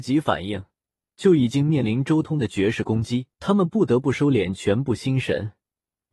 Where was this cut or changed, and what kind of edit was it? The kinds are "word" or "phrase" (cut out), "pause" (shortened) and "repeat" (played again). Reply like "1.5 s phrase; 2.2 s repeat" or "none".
3.3 s pause